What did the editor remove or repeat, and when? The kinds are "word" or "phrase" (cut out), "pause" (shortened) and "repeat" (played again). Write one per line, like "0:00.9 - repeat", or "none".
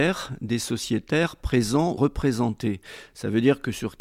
0:02.0 - word